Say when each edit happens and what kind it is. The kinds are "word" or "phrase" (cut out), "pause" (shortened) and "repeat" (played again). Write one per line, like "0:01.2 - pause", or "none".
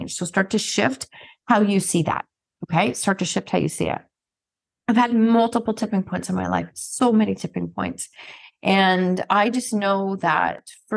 none